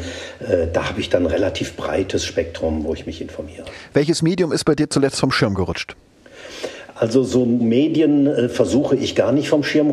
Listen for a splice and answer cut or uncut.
cut